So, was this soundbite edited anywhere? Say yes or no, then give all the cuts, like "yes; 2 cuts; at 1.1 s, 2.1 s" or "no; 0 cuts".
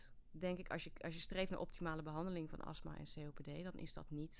no; 0 cuts